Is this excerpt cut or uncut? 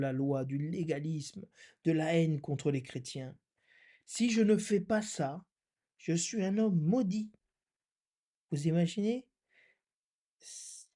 uncut